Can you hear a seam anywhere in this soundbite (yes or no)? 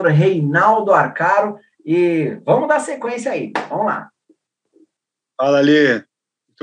no